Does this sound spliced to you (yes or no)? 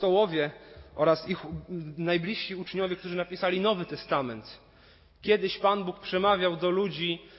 no